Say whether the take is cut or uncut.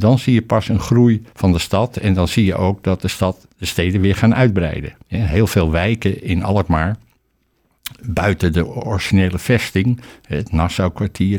cut